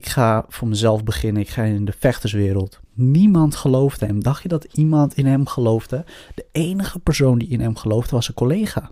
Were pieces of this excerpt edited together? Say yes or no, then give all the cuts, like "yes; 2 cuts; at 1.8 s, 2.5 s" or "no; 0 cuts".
yes; 1 cut; at 2.9 s